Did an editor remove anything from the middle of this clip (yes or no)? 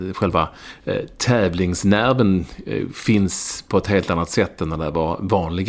no